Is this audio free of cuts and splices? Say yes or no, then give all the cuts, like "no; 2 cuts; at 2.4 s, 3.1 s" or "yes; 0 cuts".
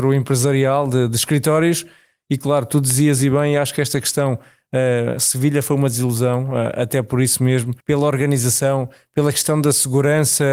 no; 1 cut; at 7.8 s